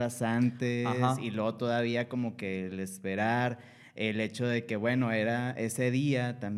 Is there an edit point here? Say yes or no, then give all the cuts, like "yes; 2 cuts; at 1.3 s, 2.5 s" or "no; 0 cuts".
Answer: no; 0 cuts